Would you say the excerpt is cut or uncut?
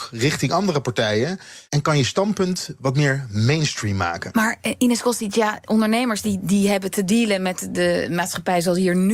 cut